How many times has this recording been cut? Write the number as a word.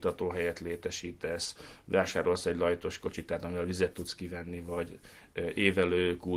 zero